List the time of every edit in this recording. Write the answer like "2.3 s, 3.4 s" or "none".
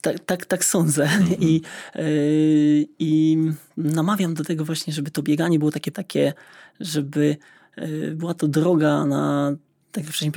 5.9 s